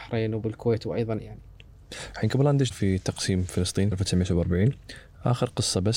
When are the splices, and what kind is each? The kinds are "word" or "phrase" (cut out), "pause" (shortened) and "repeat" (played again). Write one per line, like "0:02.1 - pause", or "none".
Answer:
0:01.2 - word
0:02.7 - word
0:03.9 - word